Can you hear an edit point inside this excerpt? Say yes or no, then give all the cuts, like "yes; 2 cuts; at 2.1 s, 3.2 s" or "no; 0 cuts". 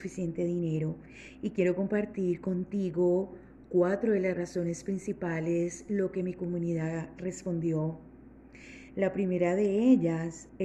no; 0 cuts